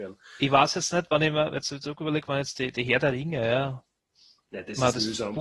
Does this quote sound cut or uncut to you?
uncut